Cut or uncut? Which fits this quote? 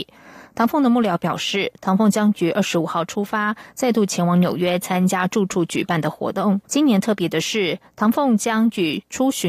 cut